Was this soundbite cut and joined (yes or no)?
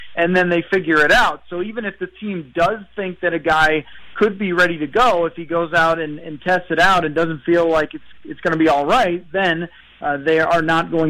no